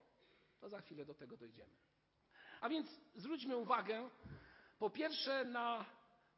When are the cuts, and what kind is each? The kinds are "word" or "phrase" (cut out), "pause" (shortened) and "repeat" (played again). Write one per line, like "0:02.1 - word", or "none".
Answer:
none